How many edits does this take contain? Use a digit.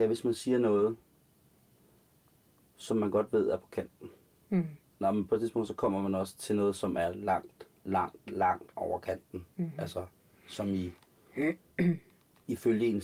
0